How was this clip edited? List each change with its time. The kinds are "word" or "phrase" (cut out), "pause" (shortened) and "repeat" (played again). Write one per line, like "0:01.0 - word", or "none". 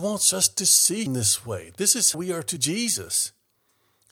0:01.1 - word
0:02.1 - word
0:02.6 - word